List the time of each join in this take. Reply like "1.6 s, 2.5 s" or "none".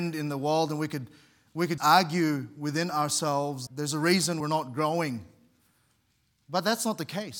1.8 s, 3.7 s, 4.4 s